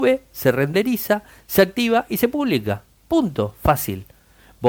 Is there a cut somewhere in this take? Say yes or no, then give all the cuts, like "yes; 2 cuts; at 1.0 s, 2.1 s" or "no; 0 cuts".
no; 0 cuts